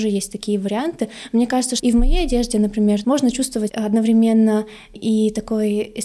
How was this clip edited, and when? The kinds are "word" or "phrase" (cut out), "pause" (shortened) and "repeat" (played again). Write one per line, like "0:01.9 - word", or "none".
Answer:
0:01.8 - word
0:03.0 - word
0:03.7 - word
0:04.9 - word